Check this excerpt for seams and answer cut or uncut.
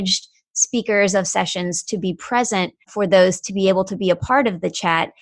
cut